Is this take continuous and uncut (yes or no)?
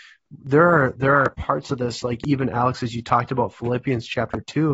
yes